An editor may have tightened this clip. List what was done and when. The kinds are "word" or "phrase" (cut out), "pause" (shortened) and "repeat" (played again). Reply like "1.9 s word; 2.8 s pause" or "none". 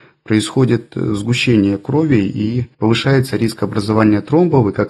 2.7 s pause